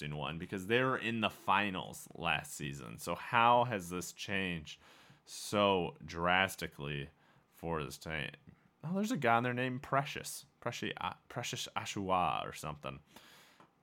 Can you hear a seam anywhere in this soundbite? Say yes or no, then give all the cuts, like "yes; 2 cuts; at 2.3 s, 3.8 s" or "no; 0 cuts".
no; 0 cuts